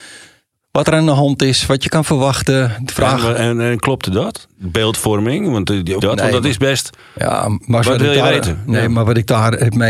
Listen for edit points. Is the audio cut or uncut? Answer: cut